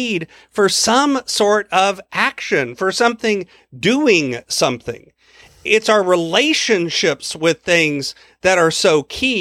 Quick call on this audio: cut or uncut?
uncut